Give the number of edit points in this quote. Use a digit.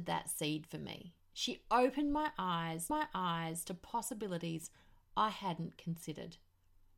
1